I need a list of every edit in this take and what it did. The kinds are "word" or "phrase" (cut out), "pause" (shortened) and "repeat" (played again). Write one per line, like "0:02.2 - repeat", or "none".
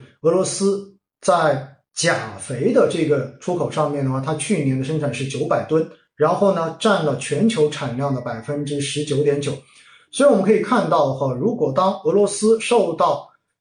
none